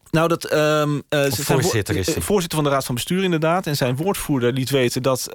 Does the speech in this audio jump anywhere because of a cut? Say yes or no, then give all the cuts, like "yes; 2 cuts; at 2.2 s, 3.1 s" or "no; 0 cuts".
no; 0 cuts